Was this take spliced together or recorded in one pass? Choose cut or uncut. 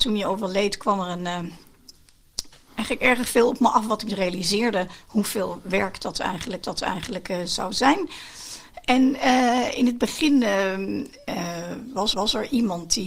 cut